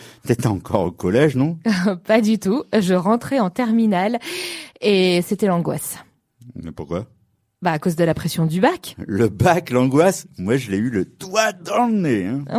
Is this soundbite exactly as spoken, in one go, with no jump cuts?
yes; 0 cuts

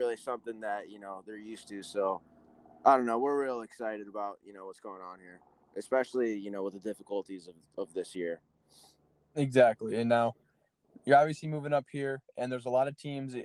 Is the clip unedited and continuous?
yes; 0 cuts

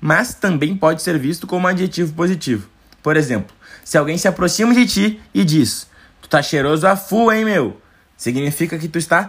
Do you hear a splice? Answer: no; 0 cuts

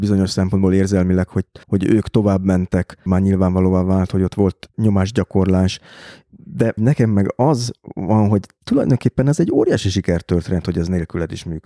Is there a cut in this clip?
yes; 4 cuts; at 1.6 s, 3.1 s, 4.7 s, 6.8 s

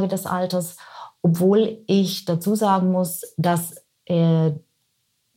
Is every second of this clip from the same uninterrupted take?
yes; 0 cuts

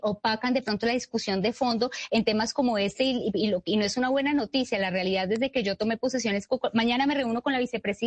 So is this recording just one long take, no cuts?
yes; 0 cuts

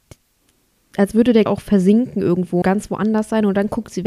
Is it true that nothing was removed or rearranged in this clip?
no; 2 cuts; at 1.5 s, 2.6 s

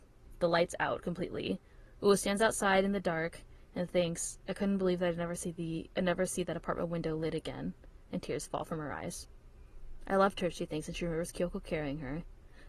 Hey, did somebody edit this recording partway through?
no; 0 cuts

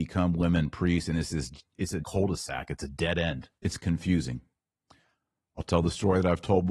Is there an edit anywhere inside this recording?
yes; 2 cuts; at 2.0 s, 3.6 s

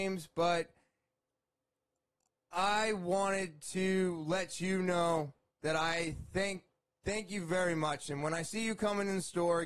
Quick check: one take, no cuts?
yes; 0 cuts

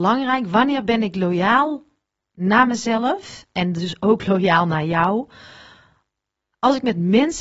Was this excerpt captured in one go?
yes; 0 cuts

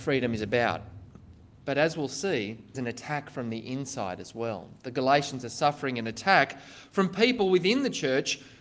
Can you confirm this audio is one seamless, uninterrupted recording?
no; 1 cut; at 2.7 s

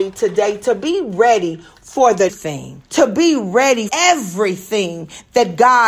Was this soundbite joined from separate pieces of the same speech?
yes; 3 cuts; at 2.3 s, 2.9 s, 3.9 s

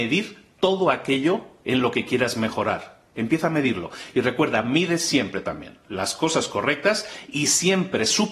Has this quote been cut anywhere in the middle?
no; 0 cuts

